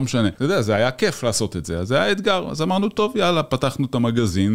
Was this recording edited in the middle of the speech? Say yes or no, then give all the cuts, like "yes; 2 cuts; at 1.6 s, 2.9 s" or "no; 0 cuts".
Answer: no; 0 cuts